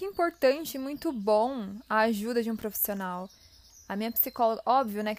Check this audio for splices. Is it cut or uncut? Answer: uncut